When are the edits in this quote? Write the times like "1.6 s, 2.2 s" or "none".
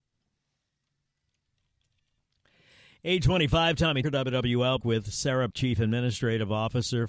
4.0 s, 4.8 s, 5.5 s